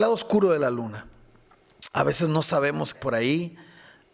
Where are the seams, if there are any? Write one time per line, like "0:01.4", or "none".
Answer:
0:01.9
0:02.9